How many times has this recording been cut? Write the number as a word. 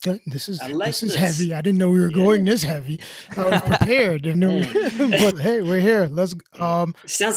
two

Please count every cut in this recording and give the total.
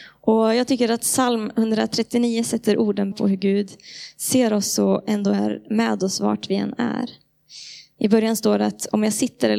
one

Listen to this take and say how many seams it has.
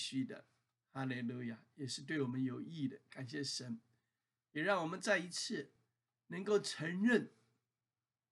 zero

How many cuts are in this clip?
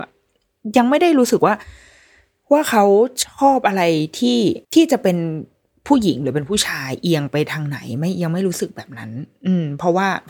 one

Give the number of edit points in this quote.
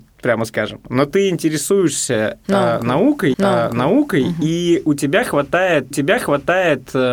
two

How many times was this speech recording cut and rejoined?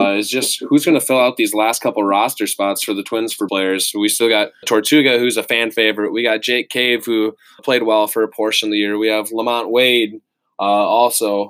three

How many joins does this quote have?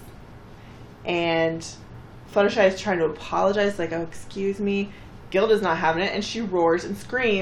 one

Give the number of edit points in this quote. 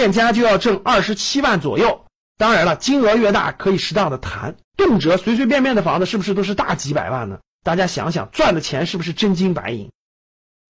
two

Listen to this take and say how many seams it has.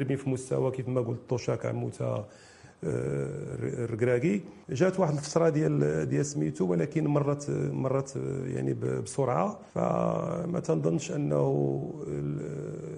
two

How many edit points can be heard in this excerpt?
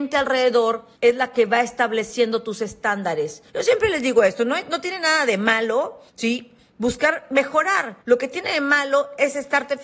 four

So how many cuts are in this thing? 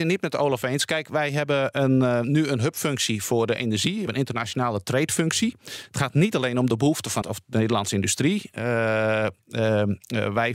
two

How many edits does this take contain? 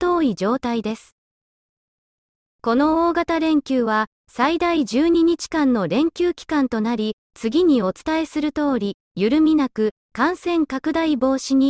zero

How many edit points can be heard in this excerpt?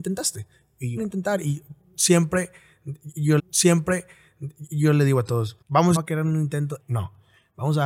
five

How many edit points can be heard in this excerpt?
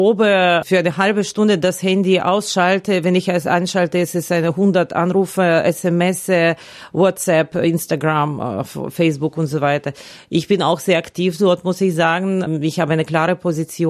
zero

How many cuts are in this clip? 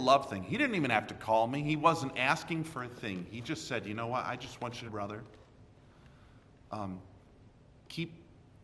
one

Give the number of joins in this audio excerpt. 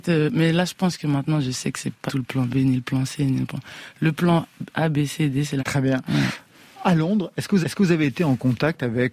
three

